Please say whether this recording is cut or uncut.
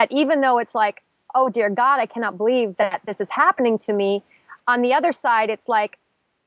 uncut